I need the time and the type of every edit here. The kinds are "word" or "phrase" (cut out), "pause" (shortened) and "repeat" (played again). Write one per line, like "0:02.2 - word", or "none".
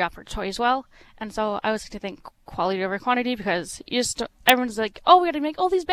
none